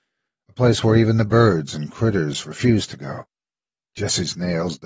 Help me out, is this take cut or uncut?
uncut